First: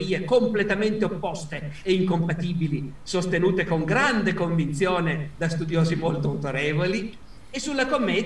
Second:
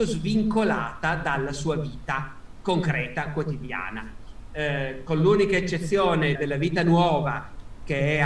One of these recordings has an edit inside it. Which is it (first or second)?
second